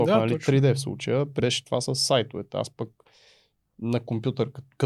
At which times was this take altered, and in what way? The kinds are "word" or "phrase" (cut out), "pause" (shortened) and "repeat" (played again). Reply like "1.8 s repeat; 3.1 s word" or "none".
1.4 s word